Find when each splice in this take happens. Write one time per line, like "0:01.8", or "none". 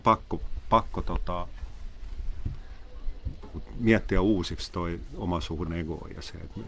0:03.5
0:05.7

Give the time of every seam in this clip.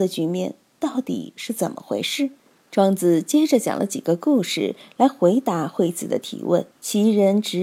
0:02.4
0:06.7

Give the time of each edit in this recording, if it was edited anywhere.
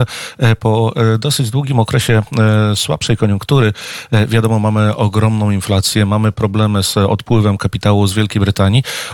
none

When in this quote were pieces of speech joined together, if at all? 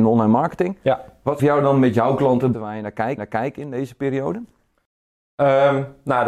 0:01.4
0:02.5
0:03.2

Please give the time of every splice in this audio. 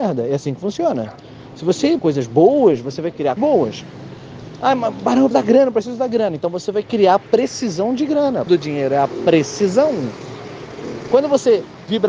0:02.0
0:03.4
0:05.3
0:08.5

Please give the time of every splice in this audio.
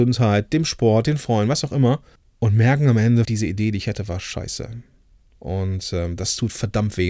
0:02.2
0:03.2

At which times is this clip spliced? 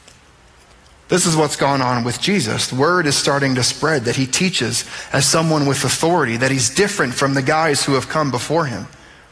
none

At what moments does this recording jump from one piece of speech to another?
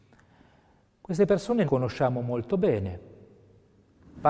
0:01.7

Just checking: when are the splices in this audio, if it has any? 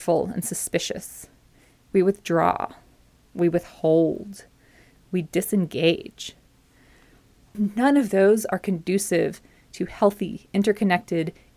none

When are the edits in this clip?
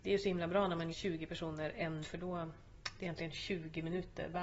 0:00.9
0:02.0
0:03.0

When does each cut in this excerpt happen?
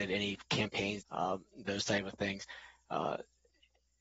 0:01.0

